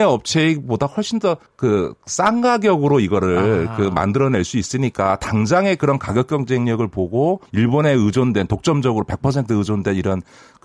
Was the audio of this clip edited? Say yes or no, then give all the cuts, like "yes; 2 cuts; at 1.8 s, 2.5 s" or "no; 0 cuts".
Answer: yes; 2 cuts; at 1.5 s, 7.5 s